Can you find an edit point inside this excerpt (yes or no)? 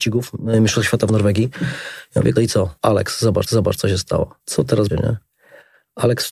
yes